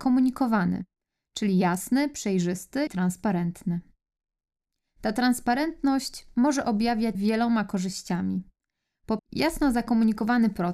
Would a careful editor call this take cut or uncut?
cut